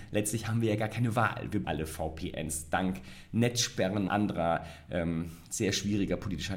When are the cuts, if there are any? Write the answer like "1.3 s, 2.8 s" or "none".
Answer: 1.6 s, 4.1 s